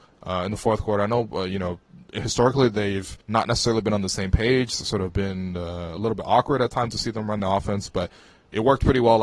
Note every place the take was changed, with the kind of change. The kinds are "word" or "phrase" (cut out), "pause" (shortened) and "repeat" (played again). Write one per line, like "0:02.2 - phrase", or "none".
0:03.2 - pause